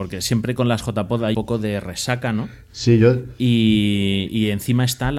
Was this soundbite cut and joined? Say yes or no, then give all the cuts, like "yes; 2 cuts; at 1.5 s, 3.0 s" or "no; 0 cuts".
yes; 1 cut; at 1.3 s